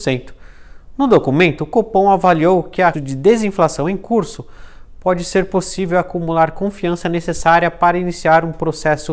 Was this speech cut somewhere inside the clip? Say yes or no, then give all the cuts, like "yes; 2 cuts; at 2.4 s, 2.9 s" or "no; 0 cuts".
yes; 1 cut; at 2.9 s